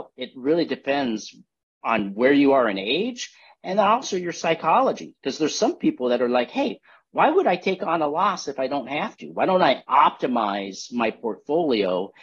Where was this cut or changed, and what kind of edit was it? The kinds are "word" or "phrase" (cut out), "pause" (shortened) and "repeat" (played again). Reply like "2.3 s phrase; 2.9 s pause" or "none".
none